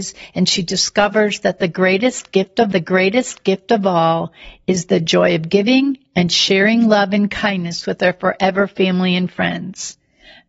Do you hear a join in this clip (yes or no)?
yes